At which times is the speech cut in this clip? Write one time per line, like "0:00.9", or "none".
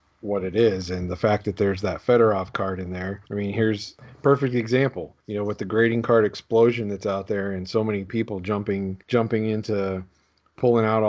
0:03.3
0:05.2
0:09.0